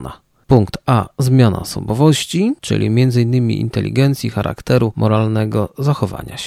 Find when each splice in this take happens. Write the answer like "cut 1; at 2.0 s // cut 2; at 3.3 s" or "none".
cut 1; at 2.6 s